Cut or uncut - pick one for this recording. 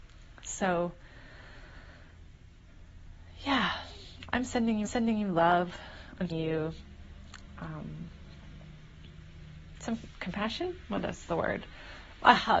cut